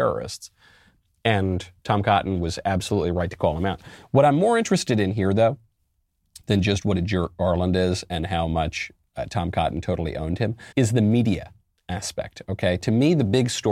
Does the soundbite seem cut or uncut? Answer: cut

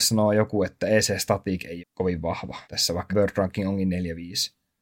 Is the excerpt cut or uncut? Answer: cut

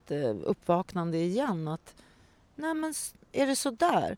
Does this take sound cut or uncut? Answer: uncut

